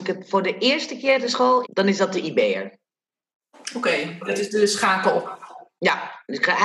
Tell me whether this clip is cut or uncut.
cut